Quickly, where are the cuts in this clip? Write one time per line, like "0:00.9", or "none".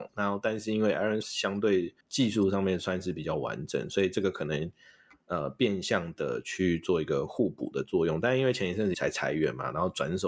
0:01.2
0:02.0
0:08.9